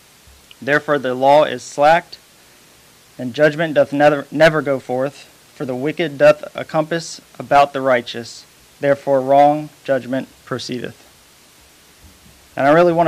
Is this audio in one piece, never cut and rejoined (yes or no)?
yes